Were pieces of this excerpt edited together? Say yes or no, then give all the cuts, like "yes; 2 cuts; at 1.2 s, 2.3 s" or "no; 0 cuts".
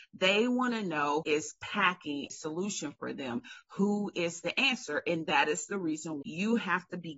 yes; 3 cuts; at 1.2 s, 2.3 s, 6.2 s